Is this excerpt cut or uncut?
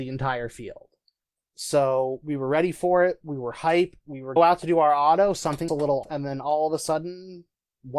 cut